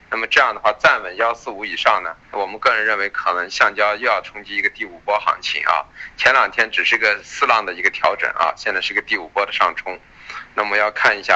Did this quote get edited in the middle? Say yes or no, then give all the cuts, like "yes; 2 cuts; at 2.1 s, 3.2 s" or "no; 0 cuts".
yes; 1 cut; at 2.2 s